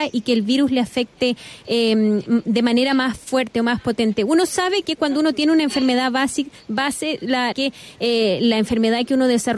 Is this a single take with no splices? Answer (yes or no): no